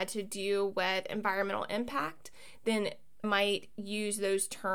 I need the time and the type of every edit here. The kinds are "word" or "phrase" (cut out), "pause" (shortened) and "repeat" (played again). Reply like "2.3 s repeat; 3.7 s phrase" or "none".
3.2 s word